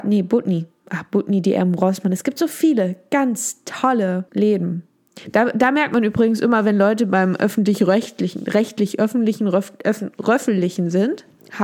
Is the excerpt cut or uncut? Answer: cut